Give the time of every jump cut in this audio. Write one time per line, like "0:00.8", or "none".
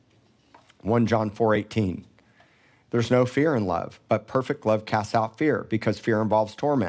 none